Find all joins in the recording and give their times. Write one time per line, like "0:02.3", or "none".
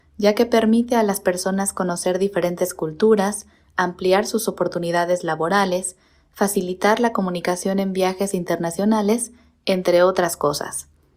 none